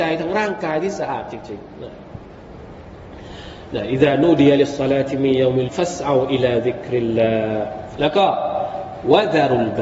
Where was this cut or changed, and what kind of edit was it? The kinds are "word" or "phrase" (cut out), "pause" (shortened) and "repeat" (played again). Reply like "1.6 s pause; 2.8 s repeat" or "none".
5.7 s word